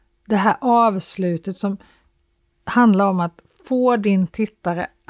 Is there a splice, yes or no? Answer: no